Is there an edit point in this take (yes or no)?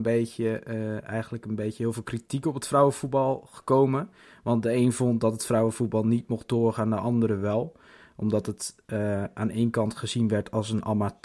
no